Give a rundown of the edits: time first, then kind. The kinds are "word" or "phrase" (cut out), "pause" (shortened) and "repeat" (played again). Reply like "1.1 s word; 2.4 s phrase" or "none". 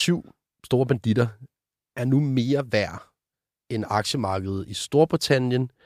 none